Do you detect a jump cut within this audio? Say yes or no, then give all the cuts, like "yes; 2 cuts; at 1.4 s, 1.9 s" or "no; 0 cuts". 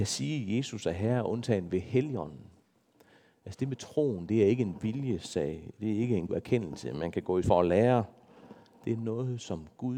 yes; 2 cuts; at 6.3 s, 7.4 s